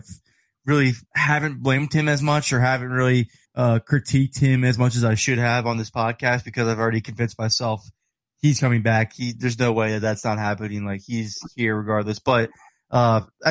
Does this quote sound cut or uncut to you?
cut